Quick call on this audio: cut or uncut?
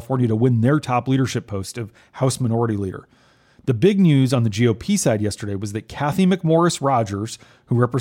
uncut